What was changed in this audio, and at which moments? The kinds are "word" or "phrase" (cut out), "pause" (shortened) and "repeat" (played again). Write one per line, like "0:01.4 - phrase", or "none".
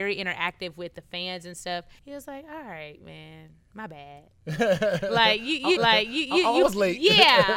0:02.0 - pause
0:05.8 - repeat